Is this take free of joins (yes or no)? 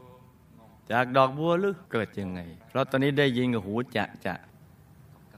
no